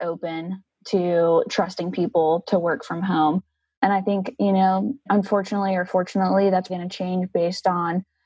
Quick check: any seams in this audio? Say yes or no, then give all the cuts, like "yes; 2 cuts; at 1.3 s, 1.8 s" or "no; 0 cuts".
yes; 1 cut; at 6.7 s